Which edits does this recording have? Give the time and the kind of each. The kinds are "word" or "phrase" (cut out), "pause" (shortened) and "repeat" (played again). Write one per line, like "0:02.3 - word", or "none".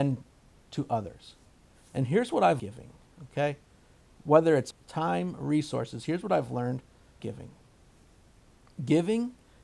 0:02.6 - phrase
0:04.7 - word
0:07.2 - word